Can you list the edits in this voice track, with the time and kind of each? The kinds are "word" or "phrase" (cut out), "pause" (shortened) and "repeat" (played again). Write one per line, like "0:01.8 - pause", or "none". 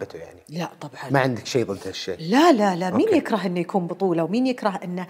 none